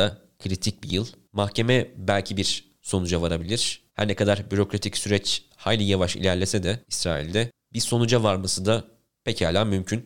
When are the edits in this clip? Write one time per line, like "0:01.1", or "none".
0:03.9
0:06.8